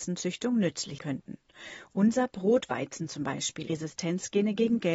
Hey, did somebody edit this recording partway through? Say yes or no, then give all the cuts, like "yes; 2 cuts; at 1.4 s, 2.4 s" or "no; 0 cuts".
yes; 2 cuts; at 1.0 s, 3.7 s